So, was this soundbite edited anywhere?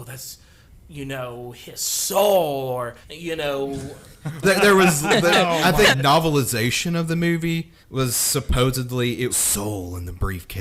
yes; 5 cuts; at 3.0 s, 4.4 s, 5.9 s, 7.8 s, 9.3 s

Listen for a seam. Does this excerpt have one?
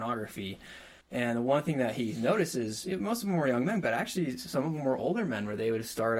yes; 1 cut; at 1.0 s

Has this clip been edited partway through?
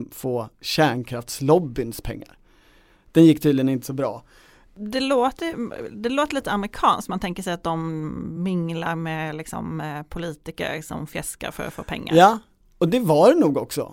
no; 0 cuts

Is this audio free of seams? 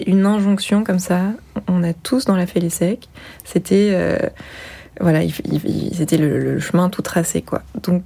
no; 1 cut; at 2.5 s

